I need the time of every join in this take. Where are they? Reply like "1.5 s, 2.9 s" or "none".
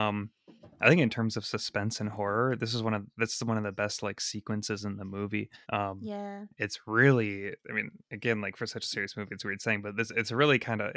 5.6 s, 7.6 s, 8.0 s